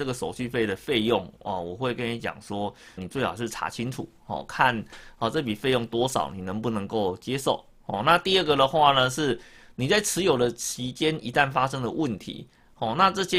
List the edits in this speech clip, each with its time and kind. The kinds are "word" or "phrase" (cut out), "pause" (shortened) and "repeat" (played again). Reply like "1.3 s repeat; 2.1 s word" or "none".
3.0 s word